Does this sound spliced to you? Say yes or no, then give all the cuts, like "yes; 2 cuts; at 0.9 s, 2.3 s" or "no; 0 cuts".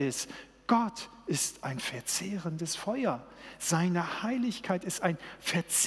no; 0 cuts